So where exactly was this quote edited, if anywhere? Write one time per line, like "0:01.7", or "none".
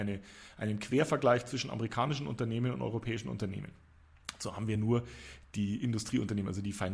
none